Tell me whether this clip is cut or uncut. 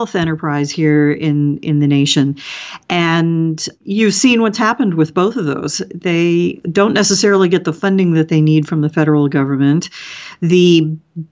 uncut